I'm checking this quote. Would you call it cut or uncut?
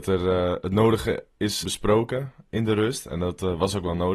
cut